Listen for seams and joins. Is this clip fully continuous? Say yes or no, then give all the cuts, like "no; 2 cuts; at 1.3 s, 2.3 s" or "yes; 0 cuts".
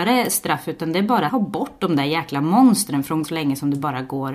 no; 2 cuts; at 1.3 s, 3.2 s